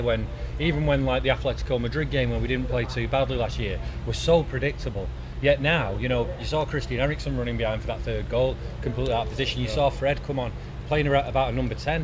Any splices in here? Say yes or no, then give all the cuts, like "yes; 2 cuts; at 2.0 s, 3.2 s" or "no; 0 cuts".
no; 0 cuts